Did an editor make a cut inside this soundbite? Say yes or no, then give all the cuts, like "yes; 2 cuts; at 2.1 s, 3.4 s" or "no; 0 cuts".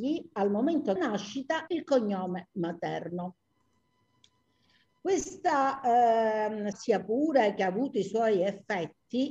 yes; 3 cuts; at 1.0 s, 1.7 s, 6.7 s